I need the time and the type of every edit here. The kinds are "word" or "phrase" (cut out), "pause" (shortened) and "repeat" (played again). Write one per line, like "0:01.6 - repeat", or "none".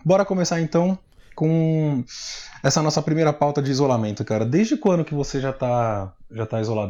none